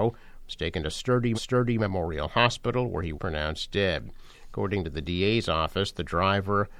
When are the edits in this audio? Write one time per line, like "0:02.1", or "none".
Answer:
0:01.3
0:03.1